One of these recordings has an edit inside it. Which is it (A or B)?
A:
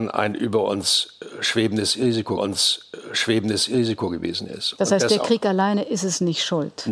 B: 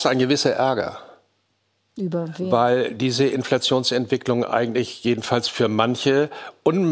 A